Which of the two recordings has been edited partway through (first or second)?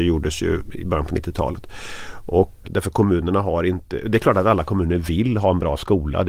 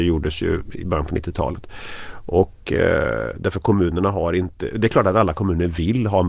first